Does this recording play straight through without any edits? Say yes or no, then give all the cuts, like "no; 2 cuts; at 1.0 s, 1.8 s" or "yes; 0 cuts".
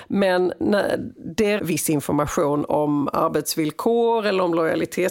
no; 1 cut; at 1.6 s